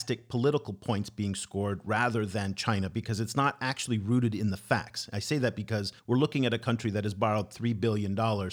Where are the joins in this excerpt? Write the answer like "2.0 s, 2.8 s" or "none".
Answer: 6.0 s